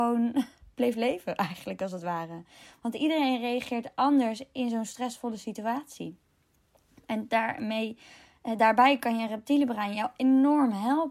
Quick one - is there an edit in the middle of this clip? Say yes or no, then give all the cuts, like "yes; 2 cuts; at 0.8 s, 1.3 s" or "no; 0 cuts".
no; 0 cuts